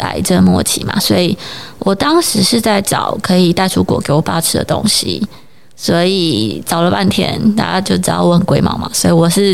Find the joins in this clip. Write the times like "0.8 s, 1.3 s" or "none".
none